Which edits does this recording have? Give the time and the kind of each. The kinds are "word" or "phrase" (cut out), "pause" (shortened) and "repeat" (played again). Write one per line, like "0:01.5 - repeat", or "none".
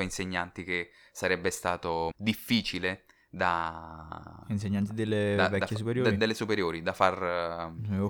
0:02.1 - word